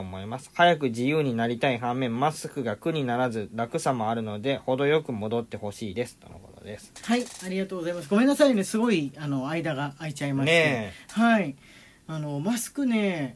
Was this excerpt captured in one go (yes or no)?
yes